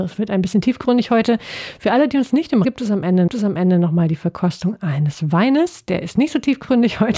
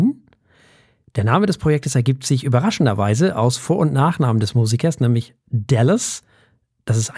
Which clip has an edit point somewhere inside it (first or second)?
first